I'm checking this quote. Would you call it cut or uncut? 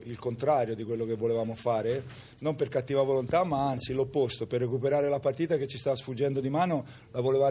uncut